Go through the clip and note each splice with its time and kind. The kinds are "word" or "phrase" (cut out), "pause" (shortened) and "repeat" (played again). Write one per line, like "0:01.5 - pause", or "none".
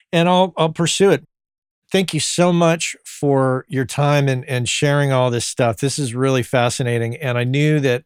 none